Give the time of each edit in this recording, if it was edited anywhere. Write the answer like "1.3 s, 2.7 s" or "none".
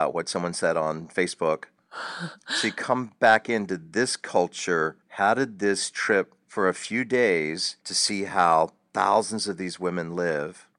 5.0 s, 6.4 s, 7.8 s